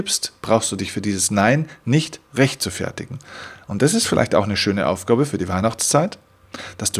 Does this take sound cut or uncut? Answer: uncut